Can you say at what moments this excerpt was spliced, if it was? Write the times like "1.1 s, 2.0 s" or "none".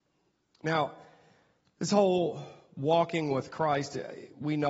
none